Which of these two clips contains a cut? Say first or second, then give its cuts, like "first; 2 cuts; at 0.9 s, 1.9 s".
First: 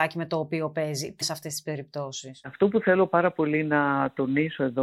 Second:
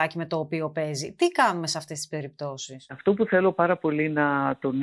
first; 1 cut; at 1.2 s